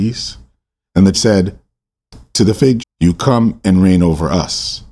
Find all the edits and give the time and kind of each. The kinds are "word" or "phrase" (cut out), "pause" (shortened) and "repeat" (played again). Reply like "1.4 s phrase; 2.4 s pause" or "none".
1.1 s word; 2.8 s word